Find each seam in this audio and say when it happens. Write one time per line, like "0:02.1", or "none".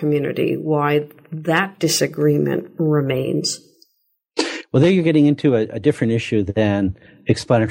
none